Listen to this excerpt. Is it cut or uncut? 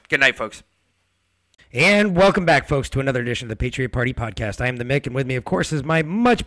uncut